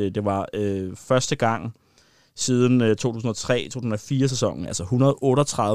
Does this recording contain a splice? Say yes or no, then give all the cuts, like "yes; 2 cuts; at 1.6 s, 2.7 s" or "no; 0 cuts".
no; 0 cuts